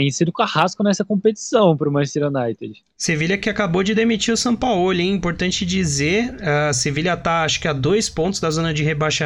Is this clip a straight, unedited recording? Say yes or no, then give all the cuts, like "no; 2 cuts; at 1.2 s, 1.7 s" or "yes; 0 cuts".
yes; 0 cuts